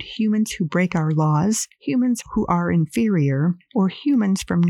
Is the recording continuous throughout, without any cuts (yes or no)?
yes